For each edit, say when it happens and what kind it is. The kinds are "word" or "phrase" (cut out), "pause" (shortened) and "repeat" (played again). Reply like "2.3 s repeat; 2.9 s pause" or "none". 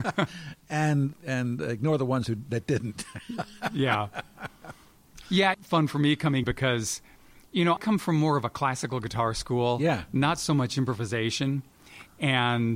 1.1 s word; 5.5 s phrase; 6.4 s word; 7.8 s word